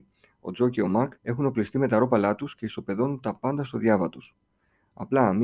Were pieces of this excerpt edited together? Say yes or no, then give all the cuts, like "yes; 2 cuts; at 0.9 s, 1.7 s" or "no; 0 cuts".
yes; 1 cut; at 1.2 s